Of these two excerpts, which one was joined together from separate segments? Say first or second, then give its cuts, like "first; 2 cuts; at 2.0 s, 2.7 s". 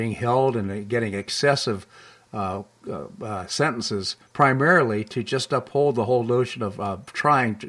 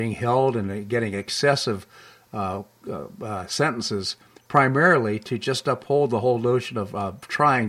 first; 1 cut; at 4.2 s